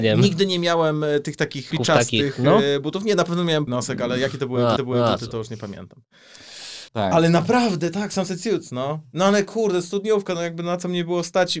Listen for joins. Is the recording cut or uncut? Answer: cut